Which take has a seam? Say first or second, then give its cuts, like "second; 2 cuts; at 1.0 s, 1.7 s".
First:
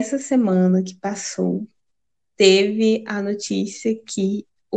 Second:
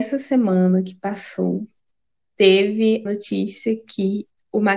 second; 1 cut; at 3.1 s